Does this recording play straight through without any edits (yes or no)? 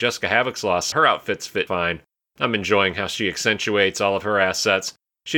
no